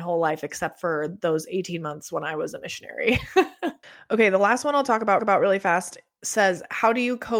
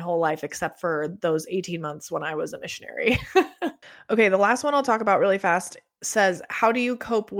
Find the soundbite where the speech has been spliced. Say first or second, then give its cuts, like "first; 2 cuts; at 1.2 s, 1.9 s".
first; 1 cut; at 5.2 s